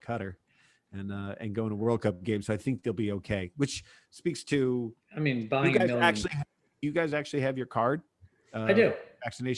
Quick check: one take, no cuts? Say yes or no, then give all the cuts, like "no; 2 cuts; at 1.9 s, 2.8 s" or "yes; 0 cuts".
yes; 0 cuts